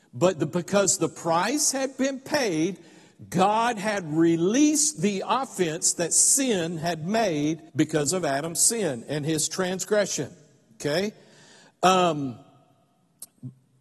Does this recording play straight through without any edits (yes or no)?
no